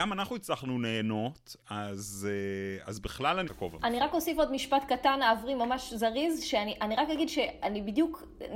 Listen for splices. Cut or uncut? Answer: cut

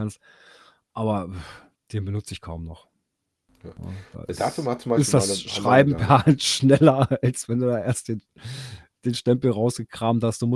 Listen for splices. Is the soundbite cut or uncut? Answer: uncut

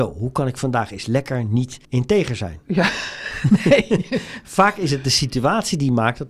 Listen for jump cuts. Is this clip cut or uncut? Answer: cut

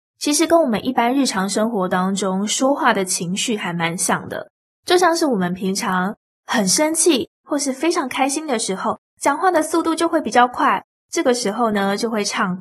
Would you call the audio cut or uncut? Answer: uncut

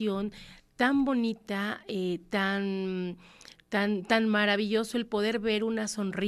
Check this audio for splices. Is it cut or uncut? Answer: uncut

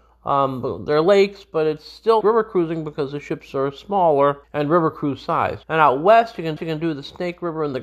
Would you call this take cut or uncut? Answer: cut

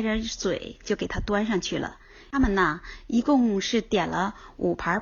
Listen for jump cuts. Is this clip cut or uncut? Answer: uncut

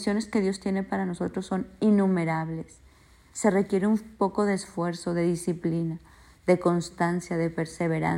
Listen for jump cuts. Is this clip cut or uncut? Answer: uncut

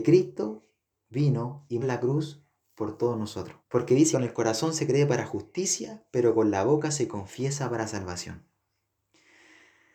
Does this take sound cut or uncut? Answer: cut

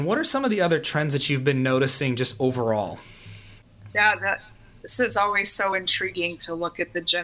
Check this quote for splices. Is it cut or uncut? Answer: uncut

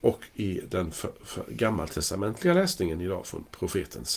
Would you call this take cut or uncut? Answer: uncut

